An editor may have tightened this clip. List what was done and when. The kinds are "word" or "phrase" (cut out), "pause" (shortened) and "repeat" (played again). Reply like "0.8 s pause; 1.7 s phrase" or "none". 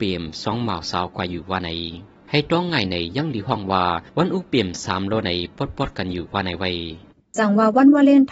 2.2 s pause; 4.1 s pause; 7.1 s pause